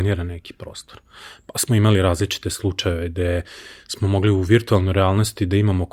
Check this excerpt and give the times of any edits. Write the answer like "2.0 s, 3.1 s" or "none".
none

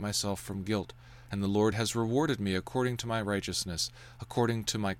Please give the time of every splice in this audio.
none

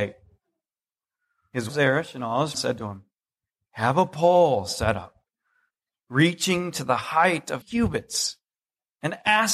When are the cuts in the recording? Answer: 1.7 s, 2.5 s, 7.6 s

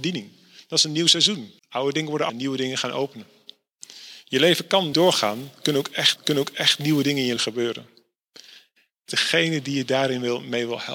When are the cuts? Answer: 1.6 s, 2.3 s, 4.9 s, 6.2 s, 7.4 s, 9.1 s

